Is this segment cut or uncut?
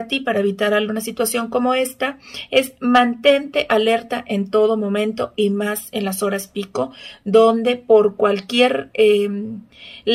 uncut